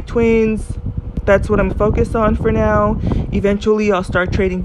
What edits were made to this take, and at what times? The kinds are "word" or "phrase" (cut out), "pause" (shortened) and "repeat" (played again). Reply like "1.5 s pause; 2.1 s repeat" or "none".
1.7 s word